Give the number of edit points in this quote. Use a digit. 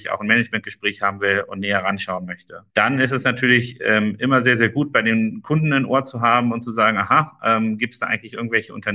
0